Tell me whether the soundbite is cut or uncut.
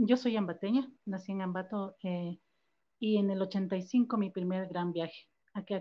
cut